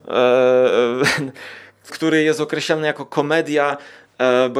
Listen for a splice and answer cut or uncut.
cut